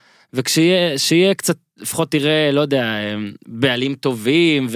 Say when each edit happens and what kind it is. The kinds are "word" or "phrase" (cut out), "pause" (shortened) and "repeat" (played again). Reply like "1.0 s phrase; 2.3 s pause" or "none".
none

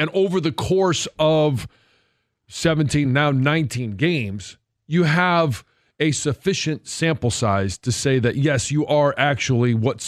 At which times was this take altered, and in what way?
none

